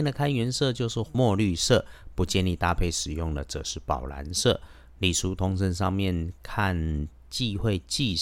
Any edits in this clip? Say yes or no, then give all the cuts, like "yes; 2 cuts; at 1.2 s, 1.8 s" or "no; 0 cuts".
no; 0 cuts